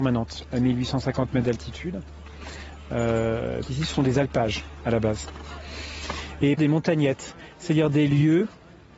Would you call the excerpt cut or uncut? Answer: cut